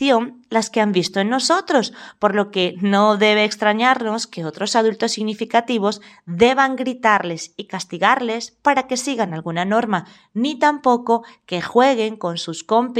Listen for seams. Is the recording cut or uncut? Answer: uncut